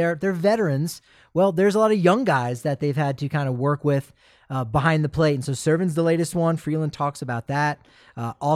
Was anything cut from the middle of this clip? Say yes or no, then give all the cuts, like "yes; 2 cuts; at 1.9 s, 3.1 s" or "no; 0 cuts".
no; 0 cuts